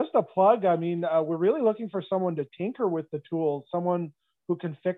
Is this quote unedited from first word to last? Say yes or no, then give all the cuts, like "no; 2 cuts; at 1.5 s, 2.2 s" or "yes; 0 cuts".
yes; 0 cuts